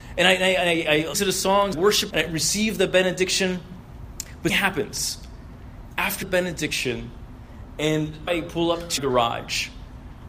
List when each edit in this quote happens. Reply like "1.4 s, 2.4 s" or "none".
1.1 s, 1.7 s, 2.1 s, 4.5 s, 6.2 s, 8.3 s, 9.0 s